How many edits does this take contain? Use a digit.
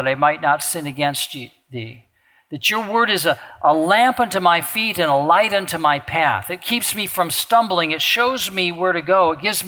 0